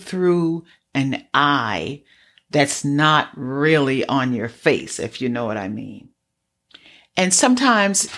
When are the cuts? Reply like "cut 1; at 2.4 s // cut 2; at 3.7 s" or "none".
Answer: none